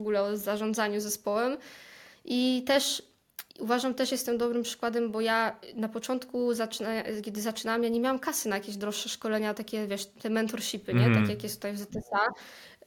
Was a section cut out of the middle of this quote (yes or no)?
yes